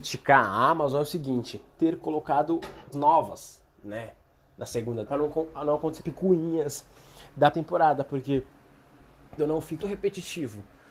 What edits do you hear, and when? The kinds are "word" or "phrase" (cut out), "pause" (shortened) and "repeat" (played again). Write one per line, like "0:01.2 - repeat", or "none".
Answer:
0:01.8 - word
0:02.9 - word
0:05.1 - word
0:06.0 - word
0:07.5 - word
0:09.4 - word
0:09.8 - word